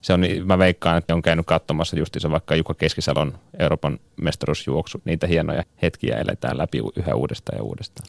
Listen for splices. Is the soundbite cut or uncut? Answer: cut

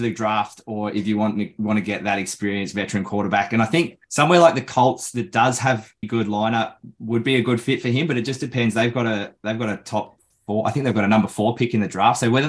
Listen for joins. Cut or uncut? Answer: cut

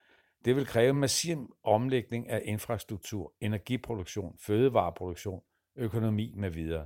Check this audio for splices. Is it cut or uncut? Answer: uncut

